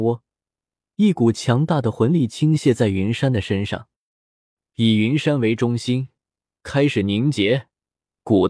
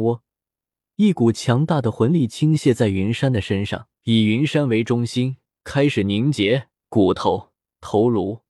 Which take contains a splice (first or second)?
second